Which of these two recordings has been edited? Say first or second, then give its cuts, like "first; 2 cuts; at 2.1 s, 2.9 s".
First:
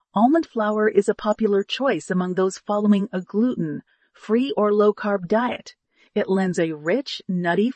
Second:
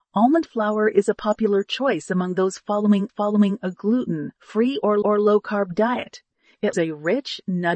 second; 4 cuts; at 3.1 s, 4.4 s, 5.0 s, 6.7 s